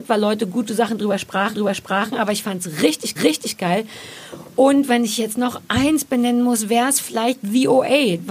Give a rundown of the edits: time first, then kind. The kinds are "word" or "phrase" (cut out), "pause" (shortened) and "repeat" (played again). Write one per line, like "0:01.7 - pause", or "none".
0:01.5 - repeat
0:03.2 - repeat